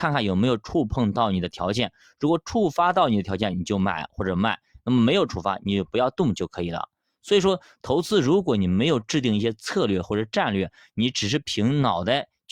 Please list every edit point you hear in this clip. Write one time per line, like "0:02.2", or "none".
none

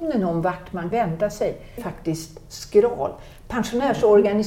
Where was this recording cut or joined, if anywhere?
0:00.9
0:01.8

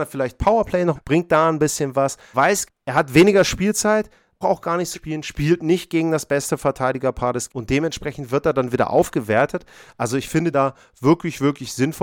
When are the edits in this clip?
0:00.9
0:02.3
0:02.7
0:04.4
0:04.9
0:07.5
0:10.5

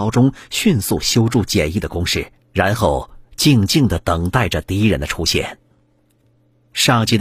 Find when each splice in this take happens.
0:02.4

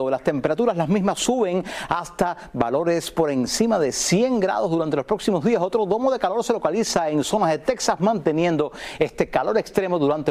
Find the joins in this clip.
none

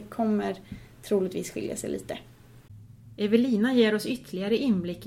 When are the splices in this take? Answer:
none

